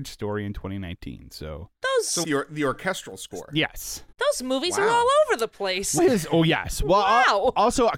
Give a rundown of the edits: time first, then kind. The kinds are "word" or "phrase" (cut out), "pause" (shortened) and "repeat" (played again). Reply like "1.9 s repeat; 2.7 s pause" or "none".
2.2 s word; 4.1 s pause; 6.0 s phrase